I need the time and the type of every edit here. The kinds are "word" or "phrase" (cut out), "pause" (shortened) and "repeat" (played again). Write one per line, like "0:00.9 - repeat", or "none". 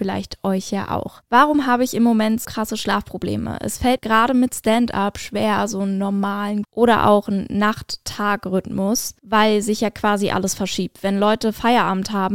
0:02.4 - word
0:04.0 - word
0:06.6 - phrase
0:09.2 - pause